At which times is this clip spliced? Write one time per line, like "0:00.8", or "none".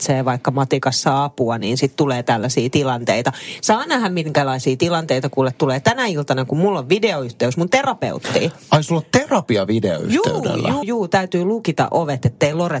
0:10.8

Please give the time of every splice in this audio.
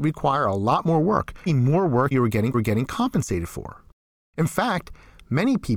0:01.5
0:02.1
0:02.5

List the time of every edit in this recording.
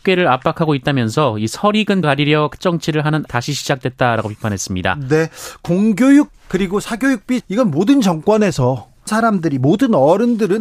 0:02.0
0:02.6
0:03.3
0:06.3
0:07.4
0:09.1

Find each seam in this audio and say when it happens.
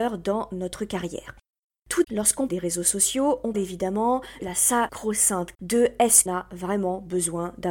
0:02.0
0:02.5
0:03.5
0:04.4
0:05.5
0:06.3

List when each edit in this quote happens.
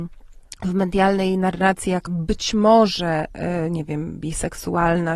0:02.1

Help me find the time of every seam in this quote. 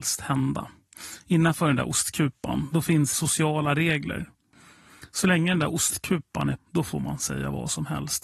0:03.1
0:06.6

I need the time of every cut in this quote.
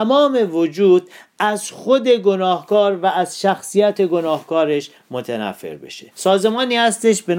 0:06.1

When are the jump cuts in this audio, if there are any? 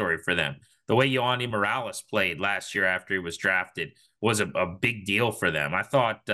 none

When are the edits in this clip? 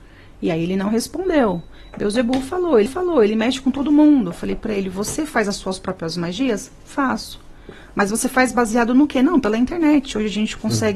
0:02.9

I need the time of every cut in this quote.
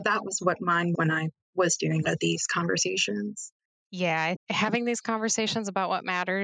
0:00.9
0:02.0
0:04.4

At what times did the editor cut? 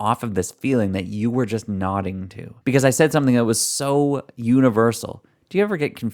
0:02.6

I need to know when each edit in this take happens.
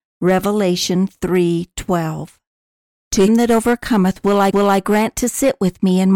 0:03.3
0:04.5

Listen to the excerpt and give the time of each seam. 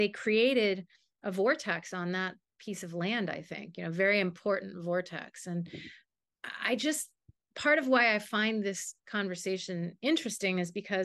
none

